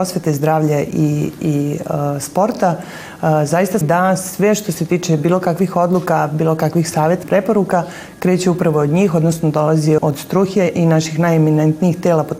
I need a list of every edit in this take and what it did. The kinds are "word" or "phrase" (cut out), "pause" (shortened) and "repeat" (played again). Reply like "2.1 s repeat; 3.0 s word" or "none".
3.8 s phrase; 7.2 s phrase; 10.0 s word